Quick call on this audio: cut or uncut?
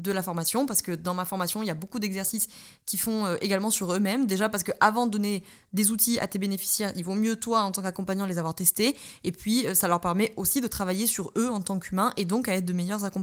uncut